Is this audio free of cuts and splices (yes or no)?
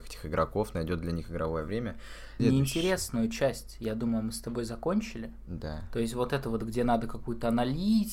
yes